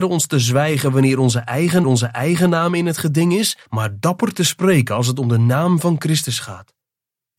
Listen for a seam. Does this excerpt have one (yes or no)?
yes